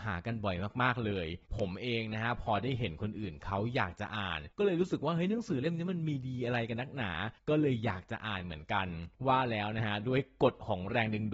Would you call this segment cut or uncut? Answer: cut